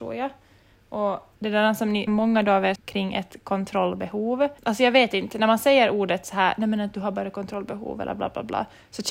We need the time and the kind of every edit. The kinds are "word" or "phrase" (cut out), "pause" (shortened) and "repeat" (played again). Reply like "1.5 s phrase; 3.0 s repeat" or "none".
1.4 s pause; 2.1 s word; 2.7 s phrase; 4.6 s pause